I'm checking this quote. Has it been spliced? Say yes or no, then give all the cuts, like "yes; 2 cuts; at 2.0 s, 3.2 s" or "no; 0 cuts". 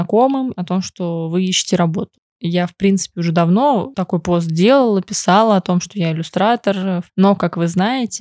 no; 0 cuts